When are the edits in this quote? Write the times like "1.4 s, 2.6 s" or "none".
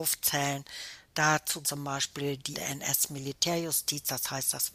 1.6 s, 2.5 s